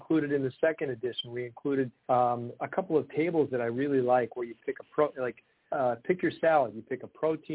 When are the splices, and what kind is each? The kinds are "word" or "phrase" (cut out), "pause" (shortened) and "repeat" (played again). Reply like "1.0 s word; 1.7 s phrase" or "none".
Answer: 2.0 s pause